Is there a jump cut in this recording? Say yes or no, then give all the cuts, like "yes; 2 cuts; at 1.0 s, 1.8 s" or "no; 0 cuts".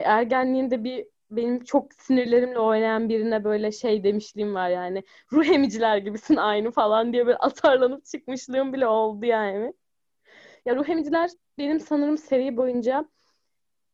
no; 0 cuts